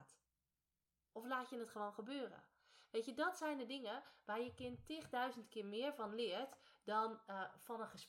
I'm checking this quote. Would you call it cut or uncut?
uncut